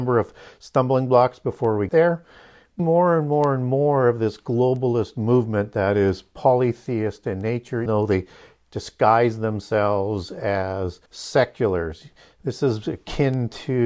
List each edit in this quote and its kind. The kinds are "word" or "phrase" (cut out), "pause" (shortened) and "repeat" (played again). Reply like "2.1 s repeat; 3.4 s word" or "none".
1.9 s word; 2.8 s phrase; 7.9 s word; 11.1 s pause